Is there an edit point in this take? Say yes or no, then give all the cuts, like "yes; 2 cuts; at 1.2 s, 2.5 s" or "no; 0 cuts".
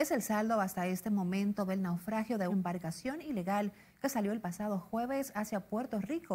yes; 1 cut; at 2.5 s